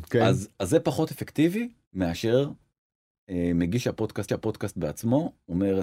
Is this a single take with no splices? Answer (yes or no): no